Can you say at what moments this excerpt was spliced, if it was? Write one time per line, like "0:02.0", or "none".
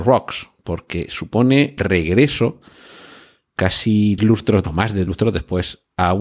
0:01.8
0:04.2
0:04.6
0:05.1

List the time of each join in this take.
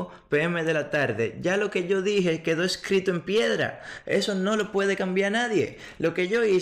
none

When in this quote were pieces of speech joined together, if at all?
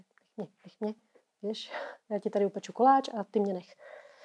none

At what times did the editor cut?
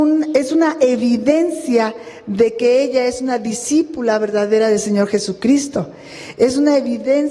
none

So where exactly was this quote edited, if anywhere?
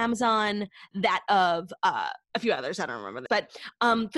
0:02.2
0:03.3

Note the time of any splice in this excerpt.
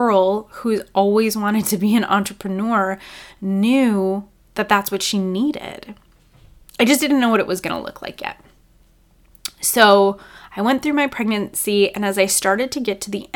none

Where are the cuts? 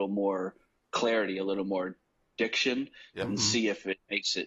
none

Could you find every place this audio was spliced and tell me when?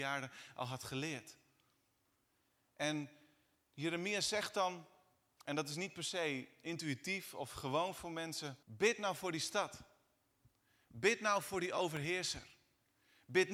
0:08.6

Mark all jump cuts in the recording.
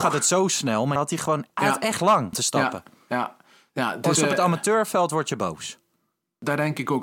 0:01.0
0:02.3
0:04.1

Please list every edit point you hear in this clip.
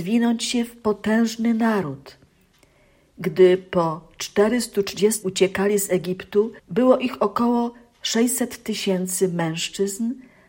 0:05.2
0:06.6

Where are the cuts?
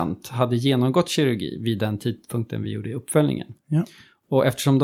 none

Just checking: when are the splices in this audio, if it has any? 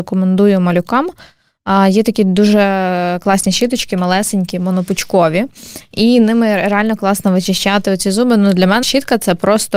0:08.8

